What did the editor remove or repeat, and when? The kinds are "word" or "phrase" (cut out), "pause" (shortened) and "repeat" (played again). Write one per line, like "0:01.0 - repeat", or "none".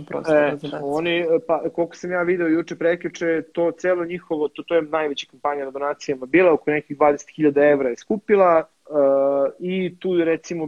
0:08.7 - pause